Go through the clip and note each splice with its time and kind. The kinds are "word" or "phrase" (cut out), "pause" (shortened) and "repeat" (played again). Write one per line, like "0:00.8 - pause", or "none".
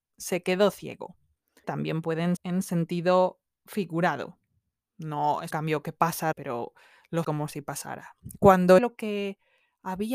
0:01.6 - word
0:02.4 - word
0:05.5 - word
0:06.3 - word
0:07.2 - word
0:08.8 - word